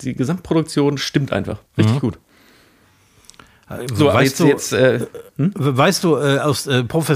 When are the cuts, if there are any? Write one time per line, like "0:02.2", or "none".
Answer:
0:01.7